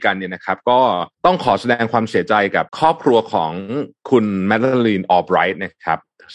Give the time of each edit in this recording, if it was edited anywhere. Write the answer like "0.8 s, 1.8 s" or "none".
1.1 s, 2.7 s